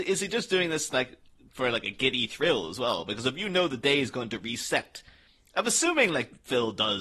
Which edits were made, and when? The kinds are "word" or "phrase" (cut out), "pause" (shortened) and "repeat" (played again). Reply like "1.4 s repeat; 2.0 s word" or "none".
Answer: none